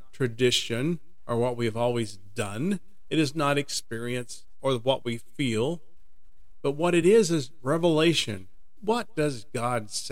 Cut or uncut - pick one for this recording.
uncut